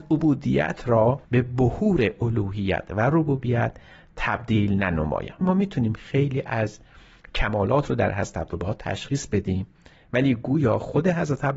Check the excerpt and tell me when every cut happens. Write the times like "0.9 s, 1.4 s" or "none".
1.2 s, 5.4 s

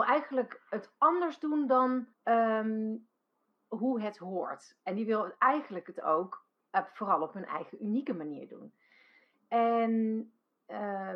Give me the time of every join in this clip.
2.1 s

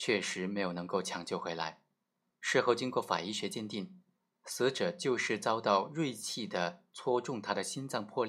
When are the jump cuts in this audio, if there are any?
none

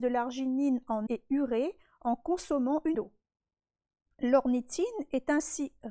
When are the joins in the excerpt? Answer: 1.1 s, 2.9 s

